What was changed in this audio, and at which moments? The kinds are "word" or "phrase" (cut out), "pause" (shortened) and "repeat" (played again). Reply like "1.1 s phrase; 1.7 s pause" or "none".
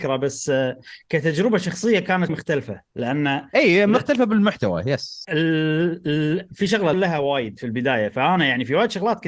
2.3 s word; 5.2 s word; 6.9 s phrase